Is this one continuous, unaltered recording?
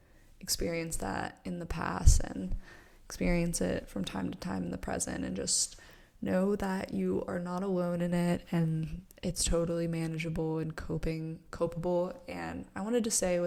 yes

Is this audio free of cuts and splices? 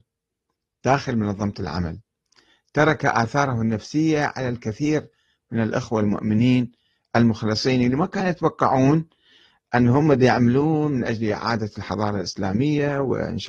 yes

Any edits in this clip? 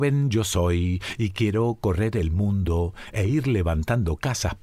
no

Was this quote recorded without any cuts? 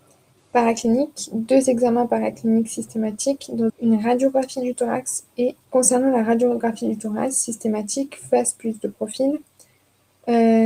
no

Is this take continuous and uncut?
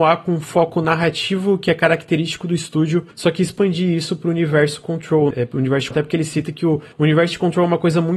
no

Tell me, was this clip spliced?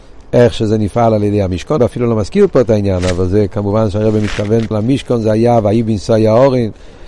yes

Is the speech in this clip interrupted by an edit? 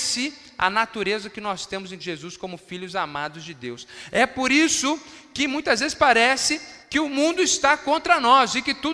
yes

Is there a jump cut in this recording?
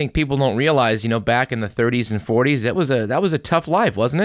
yes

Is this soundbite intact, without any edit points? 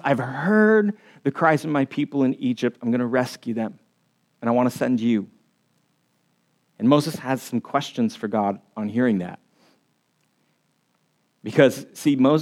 yes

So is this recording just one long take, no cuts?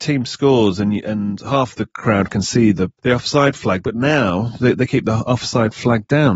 yes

